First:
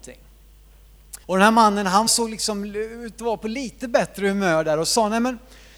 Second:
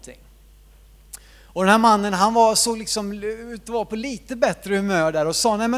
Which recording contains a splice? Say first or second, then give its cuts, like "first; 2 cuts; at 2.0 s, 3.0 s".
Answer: first; 2 cuts; at 1.2 s, 2.1 s